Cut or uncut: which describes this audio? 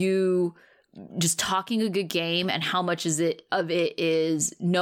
uncut